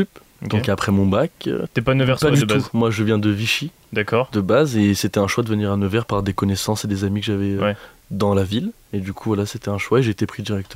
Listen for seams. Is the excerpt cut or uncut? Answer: uncut